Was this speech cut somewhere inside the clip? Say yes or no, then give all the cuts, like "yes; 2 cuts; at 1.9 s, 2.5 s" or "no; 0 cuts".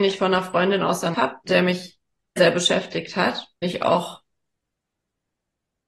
yes; 4 cuts; at 1.1 s, 1.5 s, 2.4 s, 3.6 s